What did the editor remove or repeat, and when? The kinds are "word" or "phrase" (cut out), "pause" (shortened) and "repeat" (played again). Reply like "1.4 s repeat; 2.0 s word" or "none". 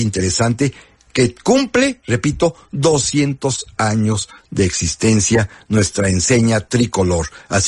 none